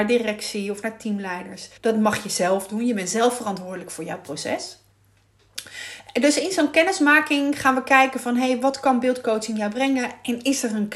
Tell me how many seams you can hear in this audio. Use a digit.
1